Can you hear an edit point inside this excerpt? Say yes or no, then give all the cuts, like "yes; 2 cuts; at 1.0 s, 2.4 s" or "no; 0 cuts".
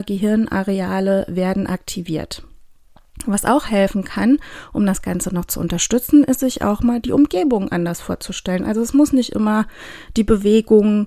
no; 0 cuts